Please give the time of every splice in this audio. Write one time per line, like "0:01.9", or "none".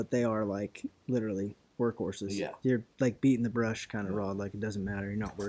none